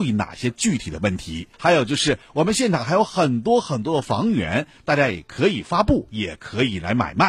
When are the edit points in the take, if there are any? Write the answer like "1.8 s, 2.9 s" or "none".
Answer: 1.5 s